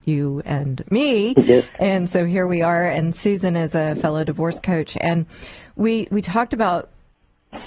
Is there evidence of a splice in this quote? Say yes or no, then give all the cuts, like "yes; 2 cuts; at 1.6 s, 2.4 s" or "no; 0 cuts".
no; 0 cuts